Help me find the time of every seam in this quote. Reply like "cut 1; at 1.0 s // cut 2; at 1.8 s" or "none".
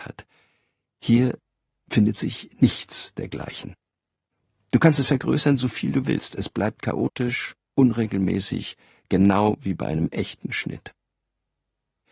none